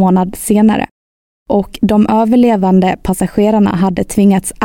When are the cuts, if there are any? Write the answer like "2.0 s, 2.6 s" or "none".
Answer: none